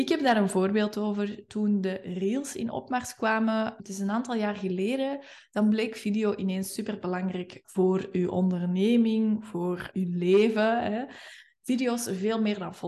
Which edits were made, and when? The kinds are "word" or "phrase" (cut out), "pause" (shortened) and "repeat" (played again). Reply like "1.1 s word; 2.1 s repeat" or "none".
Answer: 3.8 s word; 7.6 s word; 9.9 s word